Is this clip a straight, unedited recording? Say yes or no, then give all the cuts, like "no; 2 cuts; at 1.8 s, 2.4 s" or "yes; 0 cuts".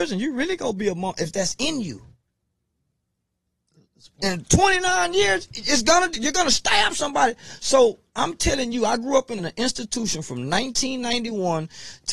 no; 1 cut; at 9.4 s